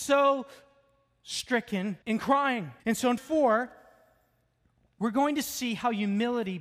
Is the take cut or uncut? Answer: cut